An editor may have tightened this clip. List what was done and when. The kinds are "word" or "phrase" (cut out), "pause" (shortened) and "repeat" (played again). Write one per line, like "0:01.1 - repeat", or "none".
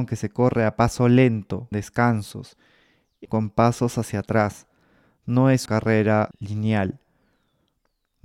0:01.7 - word
0:03.2 - word
0:05.7 - word
0:06.3 - word